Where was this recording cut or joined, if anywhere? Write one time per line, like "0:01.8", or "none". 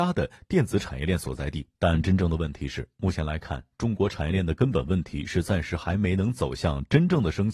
0:01.7